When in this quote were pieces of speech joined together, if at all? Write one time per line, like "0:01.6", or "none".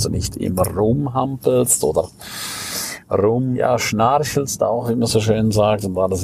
0:03.5